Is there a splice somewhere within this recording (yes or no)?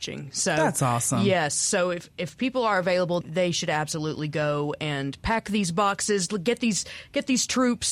yes